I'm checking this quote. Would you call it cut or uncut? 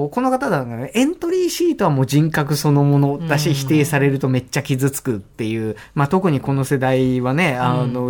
uncut